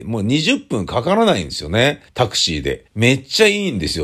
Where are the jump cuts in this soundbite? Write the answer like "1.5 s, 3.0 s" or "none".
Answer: 2.1 s, 2.9 s